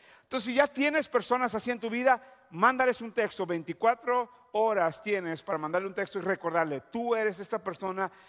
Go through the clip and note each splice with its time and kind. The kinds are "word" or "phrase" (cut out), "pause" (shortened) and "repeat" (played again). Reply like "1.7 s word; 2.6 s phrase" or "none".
none